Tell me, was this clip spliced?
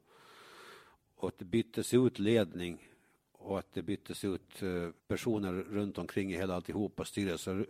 yes; 2 cuts; at 1.0 s, 5.0 s

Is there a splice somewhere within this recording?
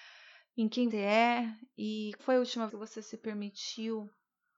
yes; 3 cuts; at 0.9 s, 2.2 s, 2.7 s

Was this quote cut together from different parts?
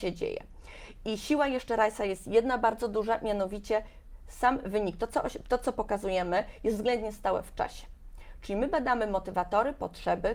no; 0 cuts

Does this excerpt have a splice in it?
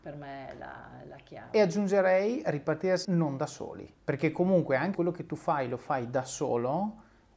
yes; 3 cuts; at 3.0 s, 3.9 s, 4.9 s

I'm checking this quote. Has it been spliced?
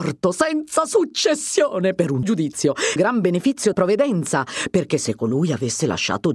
yes; 3 cuts; at 2.2 s, 3.0 s, 3.7 s

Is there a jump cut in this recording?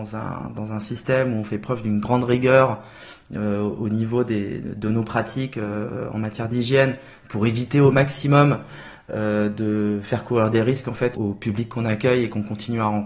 yes; 1 cut; at 11.1 s

